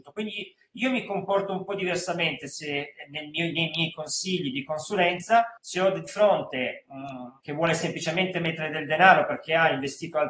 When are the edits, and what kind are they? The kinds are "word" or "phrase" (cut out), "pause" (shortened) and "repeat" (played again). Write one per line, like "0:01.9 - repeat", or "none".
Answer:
0:05.6 - pause
0:07.4 - word